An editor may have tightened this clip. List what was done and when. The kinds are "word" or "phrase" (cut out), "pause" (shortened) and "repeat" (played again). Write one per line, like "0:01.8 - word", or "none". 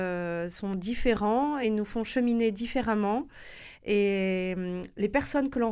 none